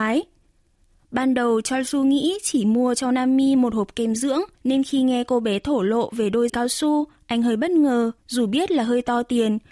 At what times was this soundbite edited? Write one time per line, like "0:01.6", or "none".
0:04.5
0:06.5
0:08.2